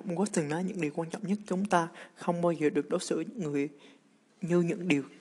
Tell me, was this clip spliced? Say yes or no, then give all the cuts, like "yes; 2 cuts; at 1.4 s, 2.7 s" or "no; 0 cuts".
no; 0 cuts